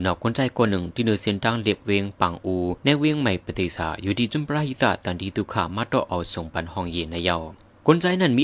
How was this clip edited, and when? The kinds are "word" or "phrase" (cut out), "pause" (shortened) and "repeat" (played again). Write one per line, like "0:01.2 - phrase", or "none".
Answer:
0:02.8 - pause

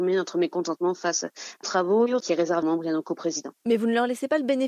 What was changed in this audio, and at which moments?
0:01.6 - word
0:02.2 - word
0:02.6 - phrase

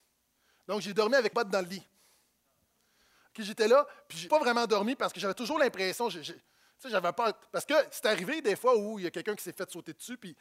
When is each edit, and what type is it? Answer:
0:01.3 - word
0:04.3 - word

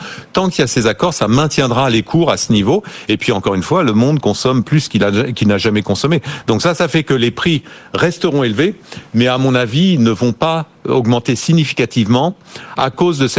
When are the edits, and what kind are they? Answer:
none

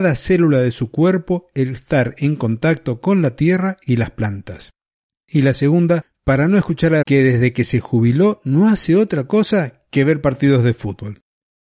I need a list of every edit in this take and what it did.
0:07.0 - word

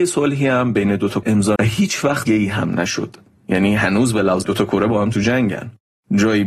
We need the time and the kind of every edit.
0:01.2 - word
0:01.6 - word
0:02.3 - word
0:04.4 - word

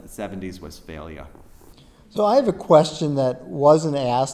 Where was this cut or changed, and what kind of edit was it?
none

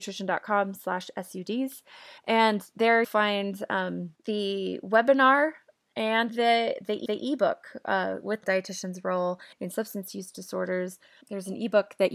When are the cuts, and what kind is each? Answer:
0:02.2 - pause
0:03.0 - word
0:04.2 - pause
0:06.3 - word
0:07.1 - repeat
0:08.4 - phrase
0:09.5 - pause
0:11.2 - word

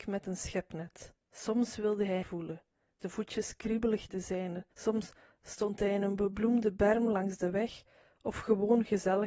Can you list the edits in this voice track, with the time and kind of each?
0:01.2 - pause
0:02.2 - phrase
0:04.1 - word
0:04.7 - pause

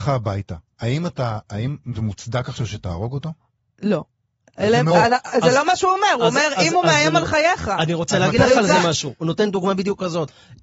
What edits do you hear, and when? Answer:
none

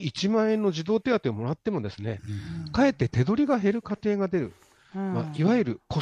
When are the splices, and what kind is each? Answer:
none

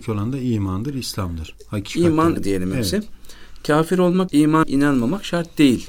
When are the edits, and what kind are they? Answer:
0:02.4 - word
0:04.3 - word
0:04.6 - phrase

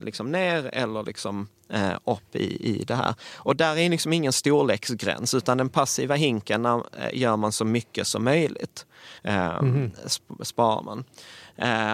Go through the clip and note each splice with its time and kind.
0:09.2 - pause

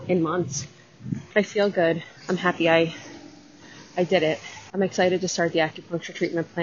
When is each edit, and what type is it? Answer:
0:02.2 - pause
0:04.7 - pause

